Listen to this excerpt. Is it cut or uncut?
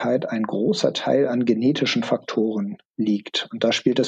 cut